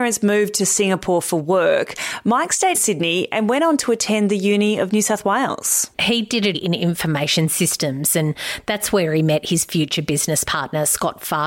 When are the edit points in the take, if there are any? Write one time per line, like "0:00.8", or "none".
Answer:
0:02.7
0:05.9
0:06.5